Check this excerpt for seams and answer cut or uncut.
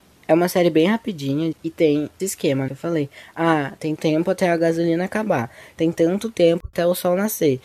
cut